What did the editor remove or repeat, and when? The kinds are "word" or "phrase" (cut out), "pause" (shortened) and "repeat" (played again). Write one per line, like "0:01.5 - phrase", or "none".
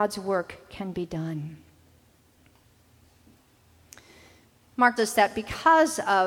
0:05.0 - word